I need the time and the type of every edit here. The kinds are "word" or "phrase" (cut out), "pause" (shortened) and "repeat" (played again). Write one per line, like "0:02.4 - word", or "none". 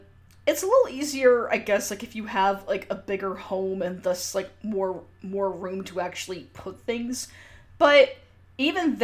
none